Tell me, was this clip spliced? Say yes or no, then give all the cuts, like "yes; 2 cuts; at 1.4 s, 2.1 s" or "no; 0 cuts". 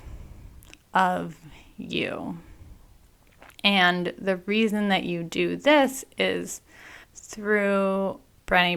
yes; 2 cuts; at 3.5 s, 7.0 s